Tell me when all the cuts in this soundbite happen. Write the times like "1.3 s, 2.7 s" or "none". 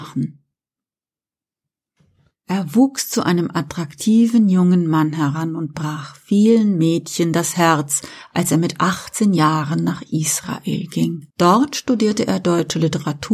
11.3 s